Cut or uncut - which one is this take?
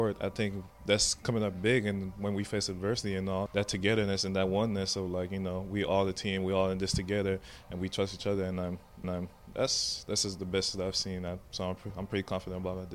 cut